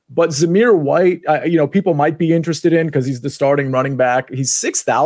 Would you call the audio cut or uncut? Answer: uncut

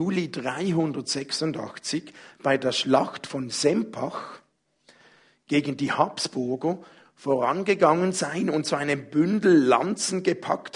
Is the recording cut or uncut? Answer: uncut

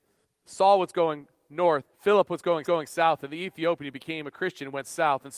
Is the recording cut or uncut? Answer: cut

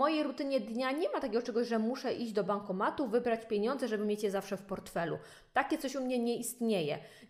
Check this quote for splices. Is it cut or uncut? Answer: uncut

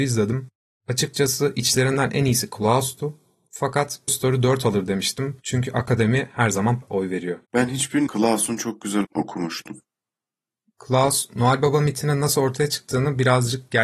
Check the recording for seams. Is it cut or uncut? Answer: cut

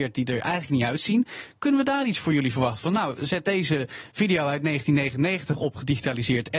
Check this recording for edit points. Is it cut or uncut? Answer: uncut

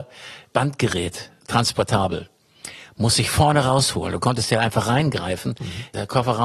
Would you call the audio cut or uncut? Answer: uncut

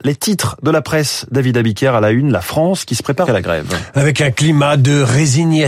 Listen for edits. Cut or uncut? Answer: cut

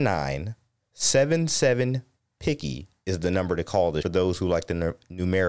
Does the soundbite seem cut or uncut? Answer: cut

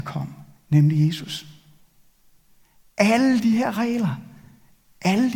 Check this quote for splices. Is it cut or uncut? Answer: uncut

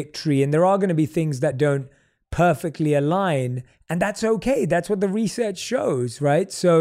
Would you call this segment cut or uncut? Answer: uncut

